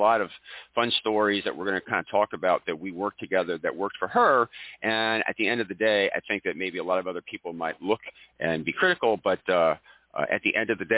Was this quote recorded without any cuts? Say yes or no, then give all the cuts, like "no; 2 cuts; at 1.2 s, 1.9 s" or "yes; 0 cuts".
yes; 0 cuts